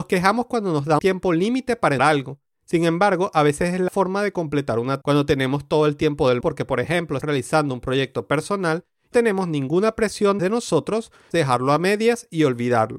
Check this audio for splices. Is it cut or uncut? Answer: cut